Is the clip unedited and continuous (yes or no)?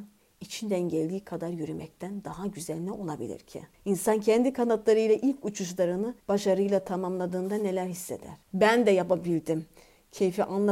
no